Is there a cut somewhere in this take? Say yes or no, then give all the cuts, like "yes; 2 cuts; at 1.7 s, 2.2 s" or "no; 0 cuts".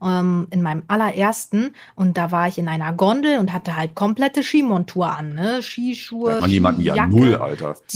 yes; 1 cut; at 6.4 s